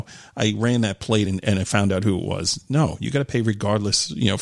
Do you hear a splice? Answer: no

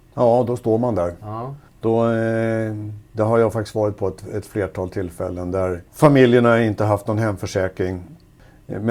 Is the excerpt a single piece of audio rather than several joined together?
no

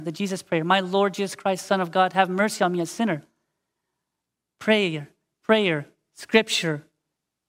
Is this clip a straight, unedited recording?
yes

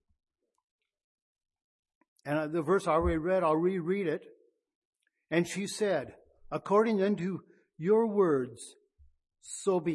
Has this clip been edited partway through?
no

